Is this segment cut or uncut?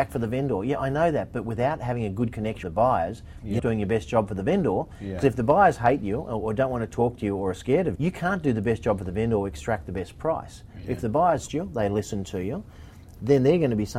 cut